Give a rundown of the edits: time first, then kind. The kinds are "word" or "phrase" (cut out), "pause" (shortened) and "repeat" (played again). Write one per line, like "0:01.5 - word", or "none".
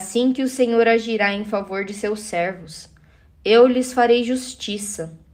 none